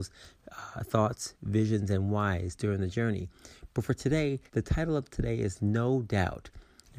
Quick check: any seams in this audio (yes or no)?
yes